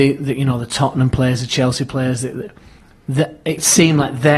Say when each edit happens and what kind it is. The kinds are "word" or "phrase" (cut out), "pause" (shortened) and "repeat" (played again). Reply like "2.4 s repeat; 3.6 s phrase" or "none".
none